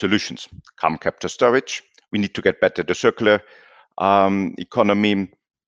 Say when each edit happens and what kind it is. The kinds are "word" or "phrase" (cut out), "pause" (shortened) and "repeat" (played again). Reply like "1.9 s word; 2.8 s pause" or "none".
none